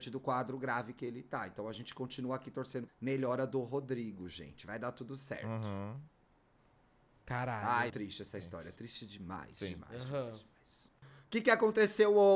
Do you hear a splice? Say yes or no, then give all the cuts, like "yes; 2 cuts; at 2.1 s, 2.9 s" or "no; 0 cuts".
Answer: yes; 2 cuts; at 2.9 s, 7.9 s